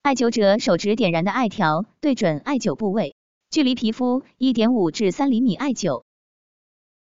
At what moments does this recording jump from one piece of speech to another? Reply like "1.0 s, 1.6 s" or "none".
none